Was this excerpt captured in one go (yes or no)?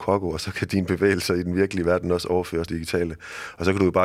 no